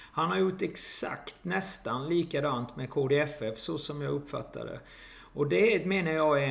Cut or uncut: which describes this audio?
uncut